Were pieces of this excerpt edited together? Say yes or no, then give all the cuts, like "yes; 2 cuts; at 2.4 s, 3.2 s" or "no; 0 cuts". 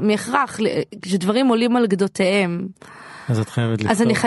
no; 0 cuts